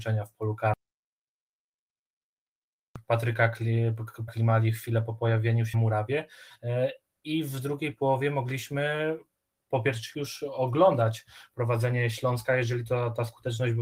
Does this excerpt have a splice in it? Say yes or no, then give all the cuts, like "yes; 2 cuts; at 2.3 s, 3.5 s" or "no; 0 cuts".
yes; 3 cuts; at 4.3 s, 5.7 s, 10.1 s